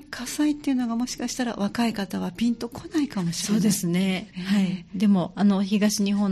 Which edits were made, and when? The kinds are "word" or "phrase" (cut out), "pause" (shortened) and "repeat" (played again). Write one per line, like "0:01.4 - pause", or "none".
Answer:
0:04.3 - pause